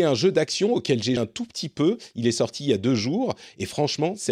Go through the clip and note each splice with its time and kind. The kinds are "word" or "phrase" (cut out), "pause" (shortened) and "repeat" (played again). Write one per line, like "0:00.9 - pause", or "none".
0:01.2 - word